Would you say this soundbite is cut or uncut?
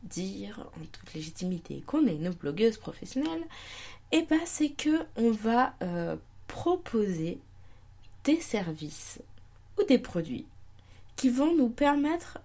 uncut